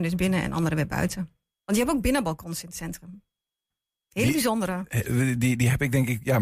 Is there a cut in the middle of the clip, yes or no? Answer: no